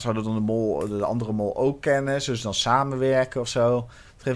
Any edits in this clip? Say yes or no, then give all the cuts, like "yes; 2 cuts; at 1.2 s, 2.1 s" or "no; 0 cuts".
no; 0 cuts